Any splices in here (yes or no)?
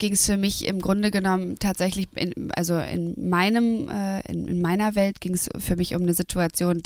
no